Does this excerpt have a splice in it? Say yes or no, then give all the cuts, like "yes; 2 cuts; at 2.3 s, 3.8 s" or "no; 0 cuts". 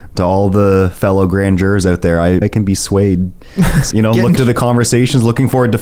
yes; 3 cuts; at 2.4 s, 3.9 s, 4.4 s